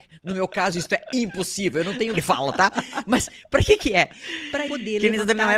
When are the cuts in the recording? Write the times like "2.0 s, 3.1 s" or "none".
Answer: 2.1 s, 4.7 s